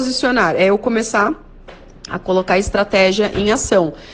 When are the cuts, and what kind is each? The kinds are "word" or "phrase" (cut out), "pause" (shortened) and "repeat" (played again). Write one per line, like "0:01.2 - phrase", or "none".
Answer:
none